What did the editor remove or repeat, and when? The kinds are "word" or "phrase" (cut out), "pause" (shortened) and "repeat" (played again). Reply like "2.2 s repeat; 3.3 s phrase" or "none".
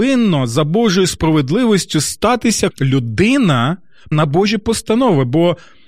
1.1 s word; 2.7 s word; 4.1 s word

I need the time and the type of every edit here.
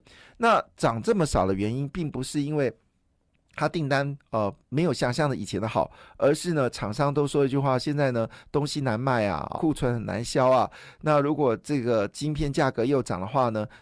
9.5 s word

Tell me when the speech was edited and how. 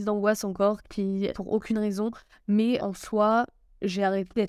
1.3 s word; 2.8 s word

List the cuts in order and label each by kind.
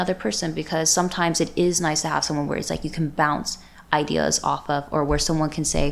none

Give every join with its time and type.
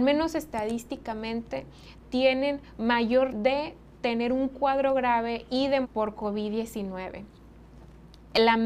3.3 s word; 5.8 s word

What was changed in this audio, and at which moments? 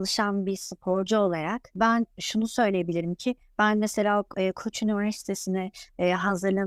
none

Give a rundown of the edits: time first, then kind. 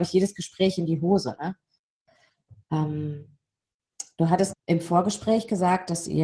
4.5 s word

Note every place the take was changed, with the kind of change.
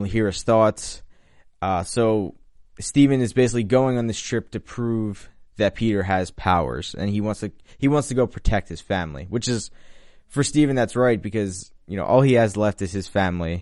none

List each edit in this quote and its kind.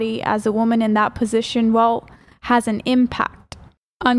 none

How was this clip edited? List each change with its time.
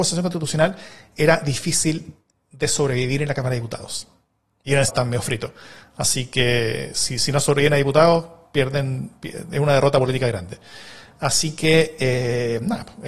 4.9 s word

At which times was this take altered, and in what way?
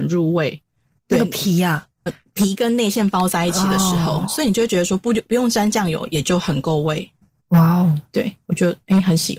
2.1 s word

